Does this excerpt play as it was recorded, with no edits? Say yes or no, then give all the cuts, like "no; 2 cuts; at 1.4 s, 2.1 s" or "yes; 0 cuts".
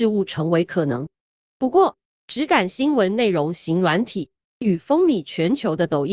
yes; 0 cuts